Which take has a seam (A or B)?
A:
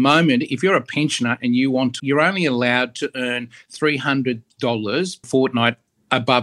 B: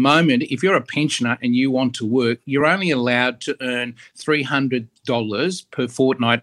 A